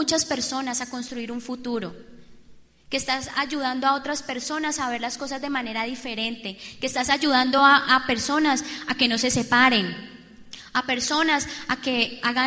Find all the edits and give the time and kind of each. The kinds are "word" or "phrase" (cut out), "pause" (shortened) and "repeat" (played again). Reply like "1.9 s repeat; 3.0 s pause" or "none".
none